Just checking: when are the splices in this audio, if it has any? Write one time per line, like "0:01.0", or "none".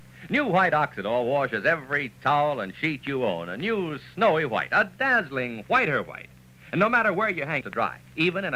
0:07.6